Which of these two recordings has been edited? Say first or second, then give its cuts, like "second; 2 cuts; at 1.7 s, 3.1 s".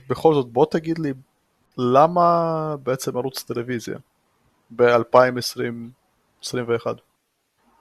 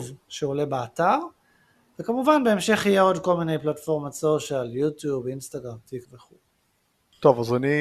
second; 1 cut; at 6.0 s